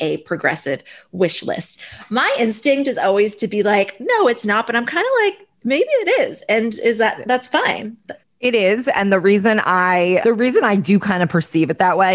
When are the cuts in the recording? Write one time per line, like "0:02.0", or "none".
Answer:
0:05.6
0:08.2
0:10.2